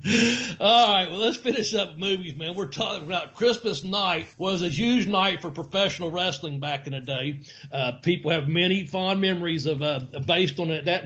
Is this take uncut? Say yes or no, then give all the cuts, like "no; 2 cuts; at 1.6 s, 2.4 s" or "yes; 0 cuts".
no; 1 cut; at 4.3 s